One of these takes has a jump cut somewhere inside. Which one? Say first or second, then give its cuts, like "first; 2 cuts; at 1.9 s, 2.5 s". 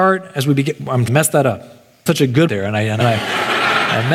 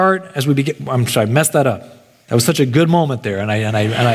first; 4 cuts; at 1.1 s, 2.1 s, 2.5 s, 3.0 s